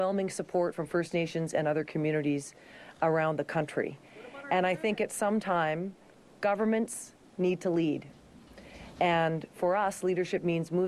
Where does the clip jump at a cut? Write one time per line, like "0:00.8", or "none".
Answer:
none